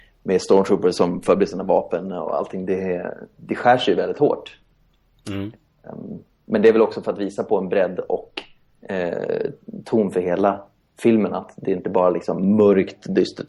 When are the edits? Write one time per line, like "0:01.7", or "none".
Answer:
none